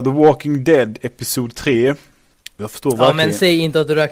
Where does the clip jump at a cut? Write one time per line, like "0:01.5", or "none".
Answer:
none